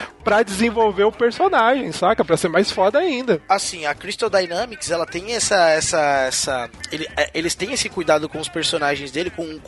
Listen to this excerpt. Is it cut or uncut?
uncut